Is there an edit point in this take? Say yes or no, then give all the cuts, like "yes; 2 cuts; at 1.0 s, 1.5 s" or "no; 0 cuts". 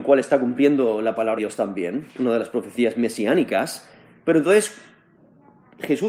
yes; 1 cut; at 1.4 s